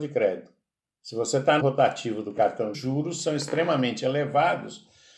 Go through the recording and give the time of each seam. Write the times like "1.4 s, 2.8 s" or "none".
1.6 s, 2.7 s